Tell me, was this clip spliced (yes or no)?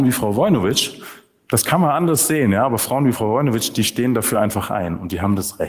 no